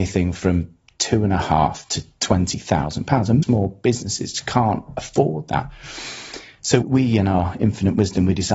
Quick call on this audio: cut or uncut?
cut